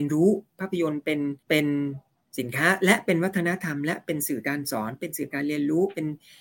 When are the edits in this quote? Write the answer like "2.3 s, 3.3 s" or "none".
1.4 s